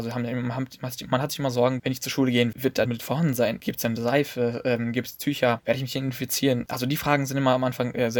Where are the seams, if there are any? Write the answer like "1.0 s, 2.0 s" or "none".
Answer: 1.8 s, 2.5 s, 2.9 s